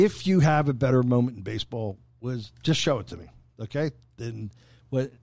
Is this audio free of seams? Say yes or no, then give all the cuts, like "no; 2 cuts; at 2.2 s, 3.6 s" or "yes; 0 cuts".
yes; 0 cuts